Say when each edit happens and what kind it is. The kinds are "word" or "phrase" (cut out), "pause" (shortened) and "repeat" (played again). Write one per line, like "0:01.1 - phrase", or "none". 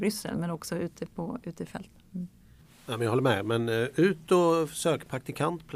none